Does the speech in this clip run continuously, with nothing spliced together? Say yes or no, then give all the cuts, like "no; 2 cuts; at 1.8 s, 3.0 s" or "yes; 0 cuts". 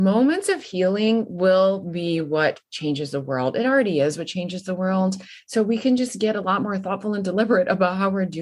yes; 0 cuts